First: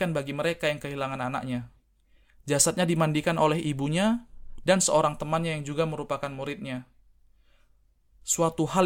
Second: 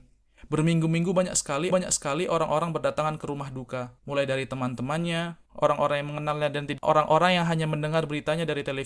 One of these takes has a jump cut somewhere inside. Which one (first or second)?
second